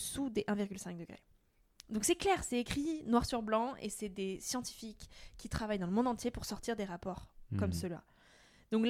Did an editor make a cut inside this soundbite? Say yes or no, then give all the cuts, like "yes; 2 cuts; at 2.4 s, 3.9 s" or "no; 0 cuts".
no; 0 cuts